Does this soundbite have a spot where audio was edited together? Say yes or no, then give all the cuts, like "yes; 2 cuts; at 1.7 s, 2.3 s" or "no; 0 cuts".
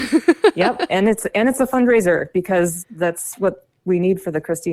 no; 0 cuts